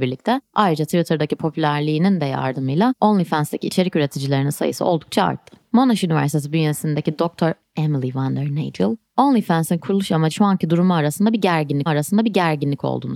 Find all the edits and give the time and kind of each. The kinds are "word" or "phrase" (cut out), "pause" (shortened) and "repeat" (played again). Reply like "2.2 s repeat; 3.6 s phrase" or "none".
10.3 s word; 11.9 s repeat